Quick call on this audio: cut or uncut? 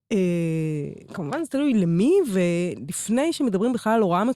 uncut